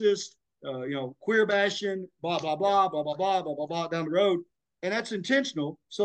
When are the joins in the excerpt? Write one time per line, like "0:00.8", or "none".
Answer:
none